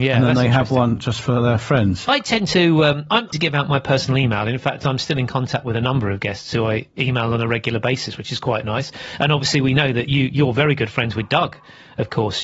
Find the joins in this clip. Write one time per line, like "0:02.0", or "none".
0:03.3